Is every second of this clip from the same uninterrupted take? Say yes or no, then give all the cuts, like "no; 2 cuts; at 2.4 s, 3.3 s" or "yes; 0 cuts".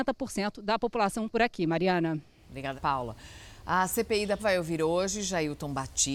no; 3 cuts; at 1.3 s, 2.7 s, 4.4 s